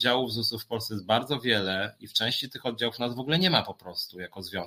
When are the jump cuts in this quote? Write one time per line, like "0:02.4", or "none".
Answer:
none